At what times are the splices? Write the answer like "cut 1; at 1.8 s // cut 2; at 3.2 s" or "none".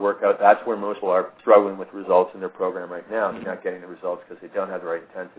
cut 1; at 1.0 s // cut 2; at 1.4 s // cut 3; at 3.4 s